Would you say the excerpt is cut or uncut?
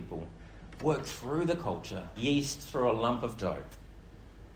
cut